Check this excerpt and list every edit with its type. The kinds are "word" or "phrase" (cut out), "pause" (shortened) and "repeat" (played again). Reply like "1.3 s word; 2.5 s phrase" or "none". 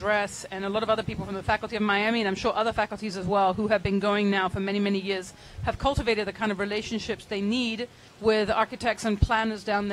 8.1 s pause